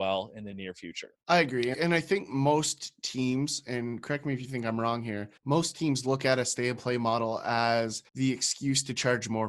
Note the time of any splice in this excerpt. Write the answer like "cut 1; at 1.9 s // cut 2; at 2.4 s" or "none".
cut 1; at 1.2 s // cut 2; at 1.7 s // cut 3; at 5.4 s // cut 4; at 8.1 s